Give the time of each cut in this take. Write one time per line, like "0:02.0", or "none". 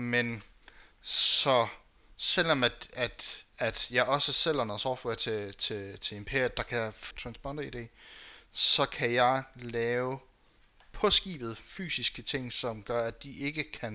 0:03.5
0:07.1